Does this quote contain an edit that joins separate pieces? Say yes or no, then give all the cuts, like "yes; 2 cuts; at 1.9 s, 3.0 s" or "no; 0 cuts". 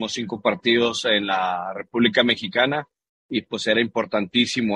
no; 0 cuts